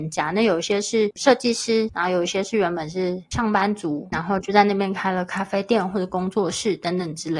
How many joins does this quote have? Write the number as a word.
one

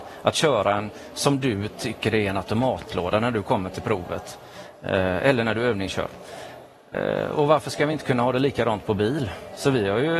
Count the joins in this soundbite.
zero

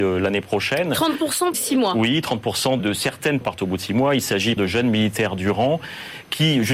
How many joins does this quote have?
four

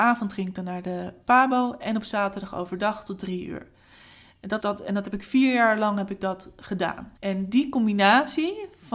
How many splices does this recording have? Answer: two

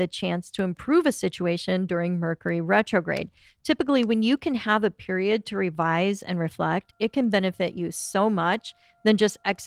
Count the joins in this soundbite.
zero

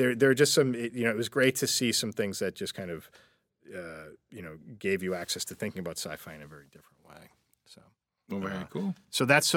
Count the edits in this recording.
zero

